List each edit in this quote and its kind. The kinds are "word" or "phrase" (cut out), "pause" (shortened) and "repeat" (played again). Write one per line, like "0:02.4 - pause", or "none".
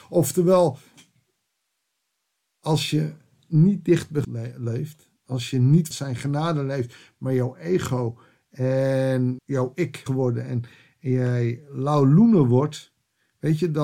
0:04.2 - word
0:05.9 - word
0:09.4 - word
0:10.1 - word